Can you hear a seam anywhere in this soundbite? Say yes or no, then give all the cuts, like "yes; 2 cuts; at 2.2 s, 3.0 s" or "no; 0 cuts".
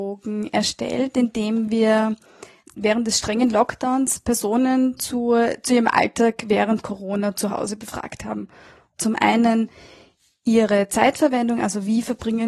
no; 0 cuts